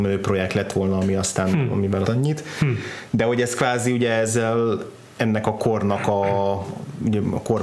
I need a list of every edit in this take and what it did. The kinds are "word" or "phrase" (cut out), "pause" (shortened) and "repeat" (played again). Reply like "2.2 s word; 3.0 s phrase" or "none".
2.0 s phrase